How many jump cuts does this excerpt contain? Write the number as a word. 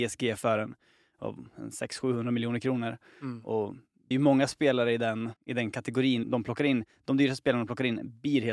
three